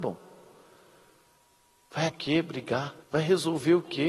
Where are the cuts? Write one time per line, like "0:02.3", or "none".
0:02.1
0:03.0